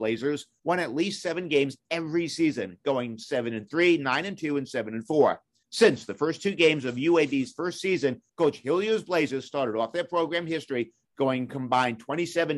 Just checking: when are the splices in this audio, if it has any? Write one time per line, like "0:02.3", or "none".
none